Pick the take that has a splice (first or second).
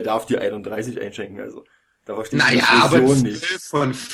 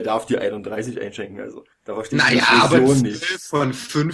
second